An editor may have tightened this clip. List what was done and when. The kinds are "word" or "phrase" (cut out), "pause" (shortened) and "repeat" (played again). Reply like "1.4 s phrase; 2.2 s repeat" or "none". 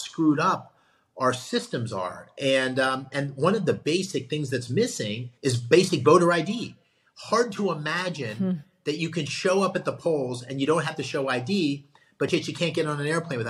5.4 s pause

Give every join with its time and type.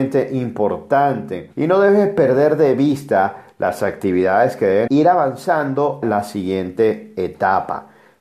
1.5 s pause; 4.9 s phrase; 6.0 s word

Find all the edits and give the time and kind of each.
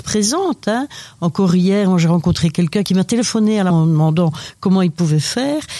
3.7 s word

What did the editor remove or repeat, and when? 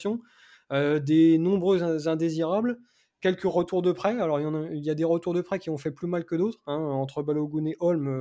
none

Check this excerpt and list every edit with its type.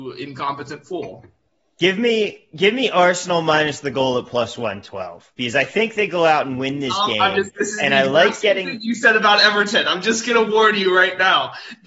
none

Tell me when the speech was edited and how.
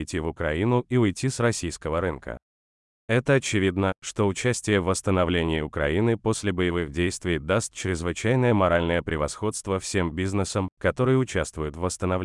none

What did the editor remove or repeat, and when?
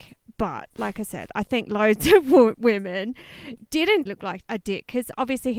4.1 s phrase

